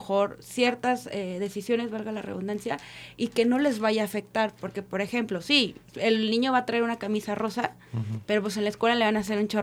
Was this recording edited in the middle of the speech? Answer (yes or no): no